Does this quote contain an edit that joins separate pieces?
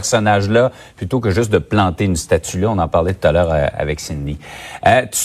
no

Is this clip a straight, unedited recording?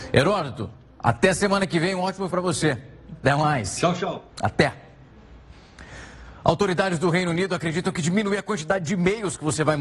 no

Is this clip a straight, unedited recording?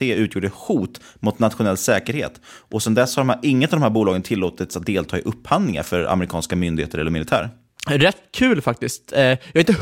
yes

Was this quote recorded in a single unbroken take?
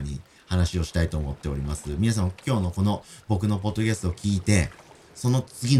yes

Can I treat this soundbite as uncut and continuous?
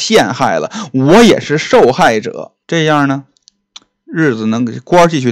no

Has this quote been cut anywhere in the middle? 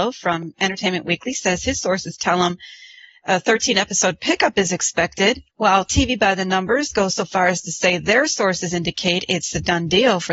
yes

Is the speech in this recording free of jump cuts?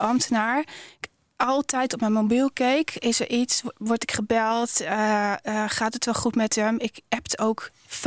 yes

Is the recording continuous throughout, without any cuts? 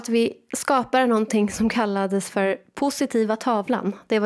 yes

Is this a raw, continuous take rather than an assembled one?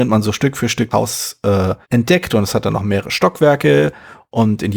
no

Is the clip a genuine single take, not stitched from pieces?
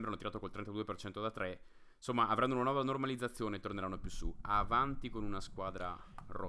yes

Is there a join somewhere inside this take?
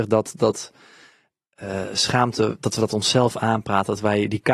no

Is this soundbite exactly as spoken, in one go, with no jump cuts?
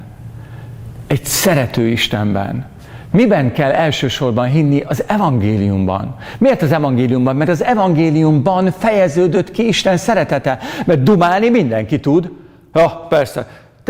yes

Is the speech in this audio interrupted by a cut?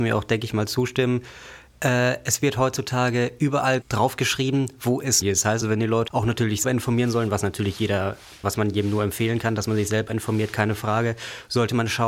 yes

